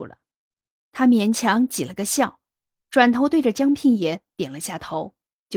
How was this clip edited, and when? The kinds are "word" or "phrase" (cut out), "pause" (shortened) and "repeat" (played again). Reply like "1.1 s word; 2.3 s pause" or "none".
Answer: none